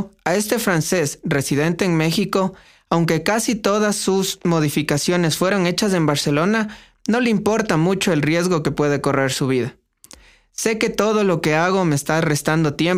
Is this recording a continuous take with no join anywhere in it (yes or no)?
yes